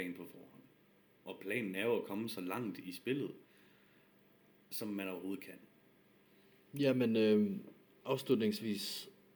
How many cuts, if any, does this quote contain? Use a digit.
0